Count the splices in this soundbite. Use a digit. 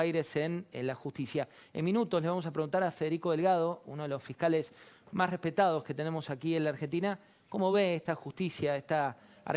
0